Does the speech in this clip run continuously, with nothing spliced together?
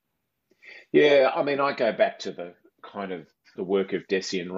no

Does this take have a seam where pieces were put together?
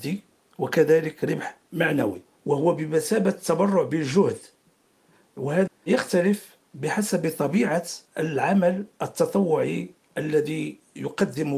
yes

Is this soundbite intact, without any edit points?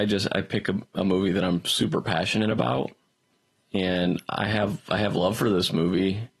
yes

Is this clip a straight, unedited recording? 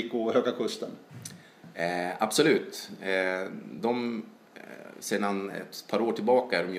yes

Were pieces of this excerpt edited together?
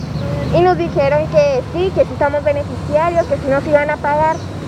no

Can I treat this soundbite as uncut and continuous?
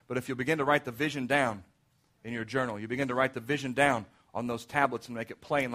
yes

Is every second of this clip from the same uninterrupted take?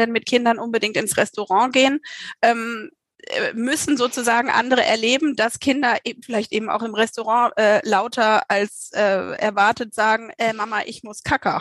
yes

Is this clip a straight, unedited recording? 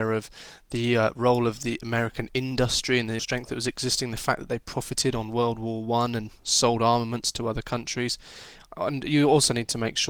no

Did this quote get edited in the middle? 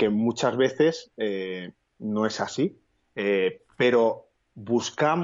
no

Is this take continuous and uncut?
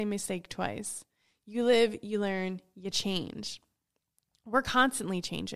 yes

